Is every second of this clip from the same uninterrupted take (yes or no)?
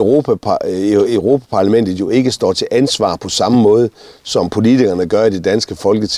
yes